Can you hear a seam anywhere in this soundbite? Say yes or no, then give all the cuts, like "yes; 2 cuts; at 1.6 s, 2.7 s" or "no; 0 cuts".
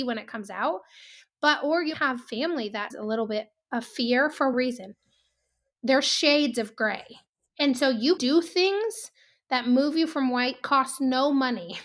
yes; 5 cuts; at 1.9 s, 2.9 s, 4.5 s, 8.2 s, 10.6 s